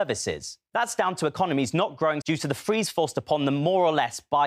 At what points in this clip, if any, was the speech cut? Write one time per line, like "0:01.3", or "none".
0:02.2